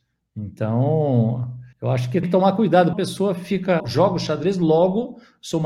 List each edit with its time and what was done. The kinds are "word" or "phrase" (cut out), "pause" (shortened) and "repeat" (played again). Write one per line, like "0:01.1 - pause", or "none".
0:01.7 - pause
0:02.2 - word
0:02.9 - phrase
0:03.8 - word